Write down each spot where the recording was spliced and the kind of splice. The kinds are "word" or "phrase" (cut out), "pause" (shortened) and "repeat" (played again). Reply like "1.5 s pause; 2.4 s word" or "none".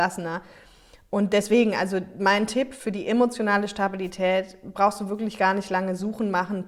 none

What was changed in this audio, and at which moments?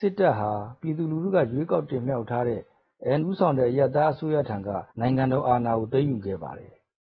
3.2 s word; 4.9 s pause

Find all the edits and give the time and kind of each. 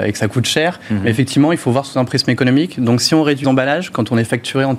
3.4 s word

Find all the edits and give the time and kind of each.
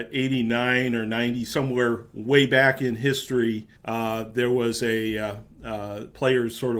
3.8 s pause

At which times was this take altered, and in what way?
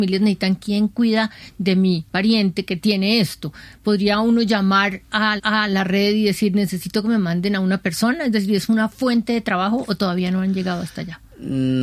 2.1 s pause; 5.4 s repeat

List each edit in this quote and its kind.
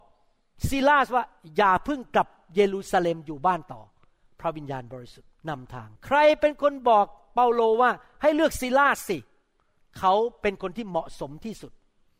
5.4 s pause; 6.0 s pause

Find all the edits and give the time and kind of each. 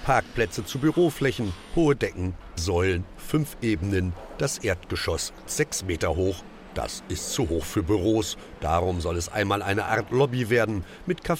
2.6 s word; 5.4 s word

